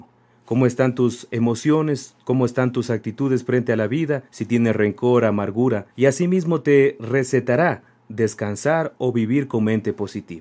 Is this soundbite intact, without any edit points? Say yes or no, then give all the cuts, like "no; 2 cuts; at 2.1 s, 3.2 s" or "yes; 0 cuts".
no; 2 cuts; at 4.3 s, 5.9 s